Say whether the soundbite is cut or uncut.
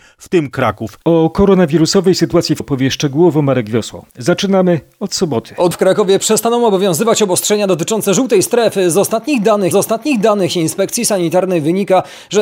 cut